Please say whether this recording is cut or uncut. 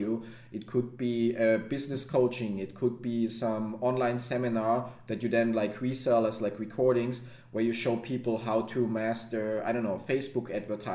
uncut